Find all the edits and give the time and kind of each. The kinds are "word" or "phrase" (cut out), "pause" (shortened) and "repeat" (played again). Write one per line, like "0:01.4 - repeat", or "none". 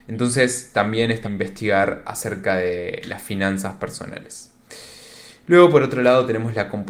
0:01.2 - word